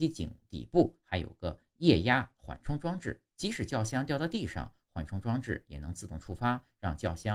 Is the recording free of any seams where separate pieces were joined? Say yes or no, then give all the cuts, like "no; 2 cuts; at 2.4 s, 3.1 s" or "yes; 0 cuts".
no; 1 cut; at 3.3 s